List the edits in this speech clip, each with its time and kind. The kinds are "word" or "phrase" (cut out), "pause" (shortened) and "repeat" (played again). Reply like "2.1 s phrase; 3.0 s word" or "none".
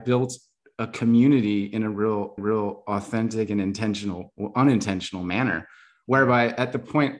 2.4 s repeat